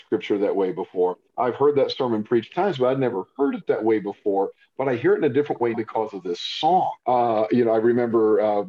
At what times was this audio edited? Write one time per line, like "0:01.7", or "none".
0:01.3
0:02.5
0:05.7
0:07.0